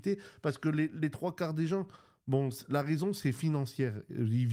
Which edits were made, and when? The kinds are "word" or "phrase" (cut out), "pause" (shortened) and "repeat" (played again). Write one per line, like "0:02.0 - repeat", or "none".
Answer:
none